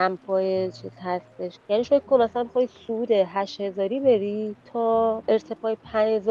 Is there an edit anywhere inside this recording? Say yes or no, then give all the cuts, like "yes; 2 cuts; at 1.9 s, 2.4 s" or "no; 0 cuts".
yes; 1 cut; at 1.8 s